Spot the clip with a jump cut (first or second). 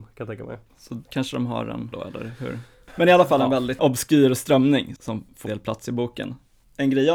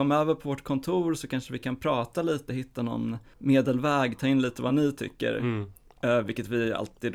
first